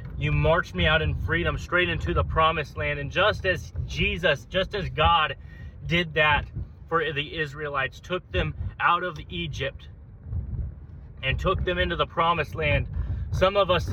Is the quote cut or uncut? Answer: uncut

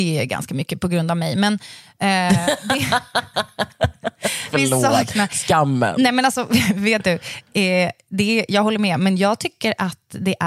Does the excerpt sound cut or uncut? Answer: uncut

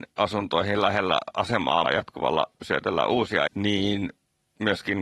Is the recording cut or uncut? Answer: cut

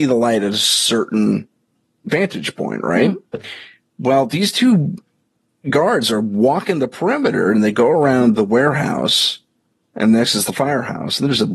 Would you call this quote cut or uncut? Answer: uncut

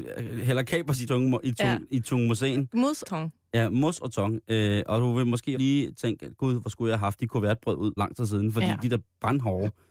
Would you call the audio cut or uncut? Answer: cut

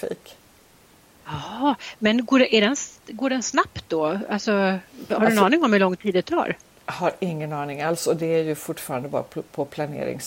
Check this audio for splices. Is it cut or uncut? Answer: uncut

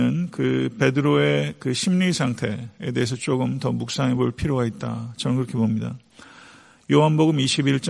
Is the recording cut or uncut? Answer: uncut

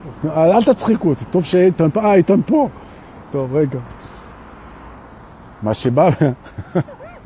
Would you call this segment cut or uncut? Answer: uncut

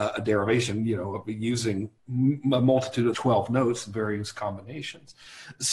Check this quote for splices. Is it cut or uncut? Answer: cut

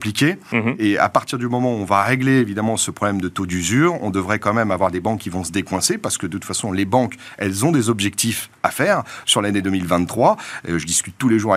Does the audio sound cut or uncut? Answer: uncut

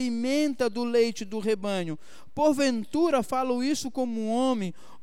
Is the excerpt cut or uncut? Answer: uncut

